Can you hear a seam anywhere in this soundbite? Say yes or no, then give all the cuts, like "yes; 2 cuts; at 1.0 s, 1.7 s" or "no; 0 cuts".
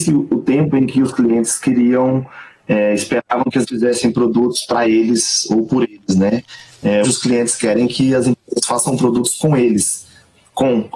yes; 2 cuts; at 3.7 s, 7.0 s